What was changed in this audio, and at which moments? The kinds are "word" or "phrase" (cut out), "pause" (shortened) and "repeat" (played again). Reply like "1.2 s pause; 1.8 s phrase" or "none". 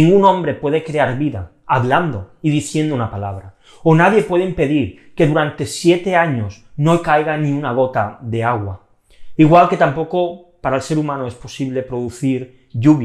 none